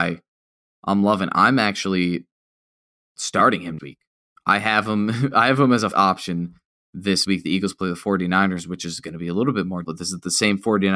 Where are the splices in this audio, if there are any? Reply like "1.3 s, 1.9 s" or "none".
3.8 s, 5.9 s, 7.2 s, 9.8 s